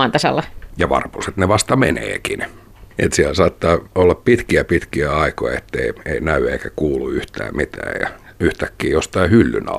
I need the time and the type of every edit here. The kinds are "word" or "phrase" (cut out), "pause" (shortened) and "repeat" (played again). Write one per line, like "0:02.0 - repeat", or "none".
0:02.9 - pause
0:03.9 - pause